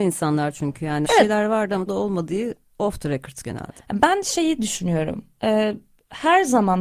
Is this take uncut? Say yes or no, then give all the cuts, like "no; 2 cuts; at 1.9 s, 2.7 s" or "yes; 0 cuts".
no; 3 cuts; at 1.0 s, 1.9 s, 3.4 s